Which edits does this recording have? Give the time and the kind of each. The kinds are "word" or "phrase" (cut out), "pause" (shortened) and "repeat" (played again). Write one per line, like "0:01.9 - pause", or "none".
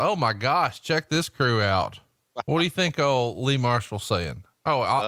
none